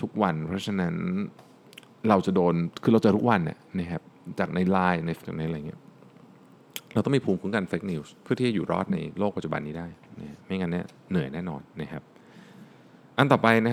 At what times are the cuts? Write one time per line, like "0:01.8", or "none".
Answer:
0:05.2